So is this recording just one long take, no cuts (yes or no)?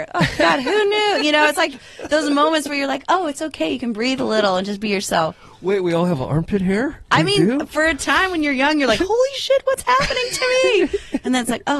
yes